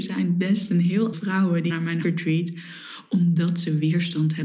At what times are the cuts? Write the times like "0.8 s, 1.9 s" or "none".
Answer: 1.1 s, 1.7 s, 2.0 s